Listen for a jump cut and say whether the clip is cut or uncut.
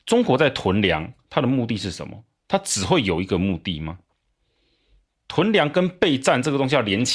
uncut